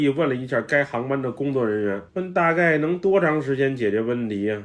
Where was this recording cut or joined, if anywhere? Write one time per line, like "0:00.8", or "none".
0:02.1